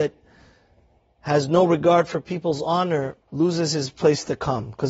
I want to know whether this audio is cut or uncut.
cut